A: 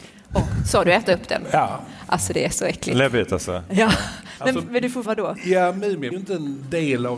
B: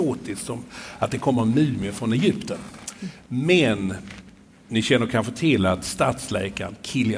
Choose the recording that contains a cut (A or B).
A